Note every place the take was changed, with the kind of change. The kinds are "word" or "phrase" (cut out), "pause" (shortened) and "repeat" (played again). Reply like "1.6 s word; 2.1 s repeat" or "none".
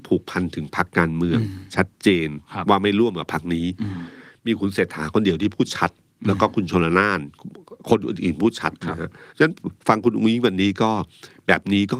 9.3 s pause

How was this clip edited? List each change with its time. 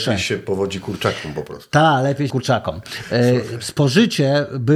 2.3 s phrase

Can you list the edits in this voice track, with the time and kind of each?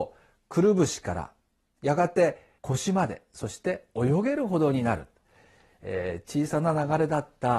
2.6 s pause

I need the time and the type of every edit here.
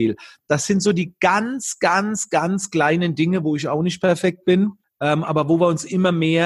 4.8 s pause

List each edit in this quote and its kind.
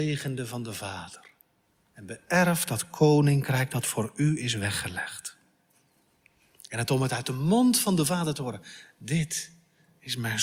none

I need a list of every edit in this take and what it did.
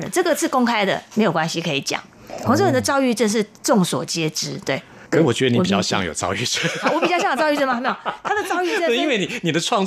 5.1 s pause

